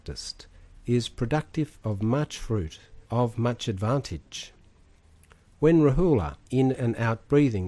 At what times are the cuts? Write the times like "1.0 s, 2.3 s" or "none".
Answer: 3.0 s, 6.4 s